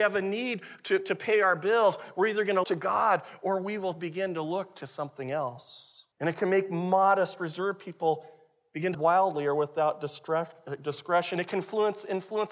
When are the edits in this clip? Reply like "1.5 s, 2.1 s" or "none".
2.6 s, 6.1 s, 8.9 s